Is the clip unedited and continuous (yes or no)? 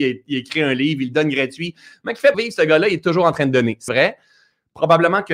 no